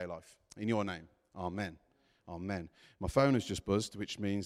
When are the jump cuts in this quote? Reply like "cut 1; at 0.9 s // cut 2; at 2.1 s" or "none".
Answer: none